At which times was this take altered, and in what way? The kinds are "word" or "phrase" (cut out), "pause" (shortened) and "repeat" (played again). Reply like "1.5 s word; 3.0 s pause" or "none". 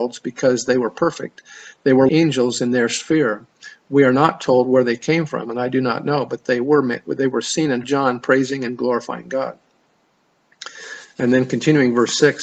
2.1 s word; 7.8 s phrase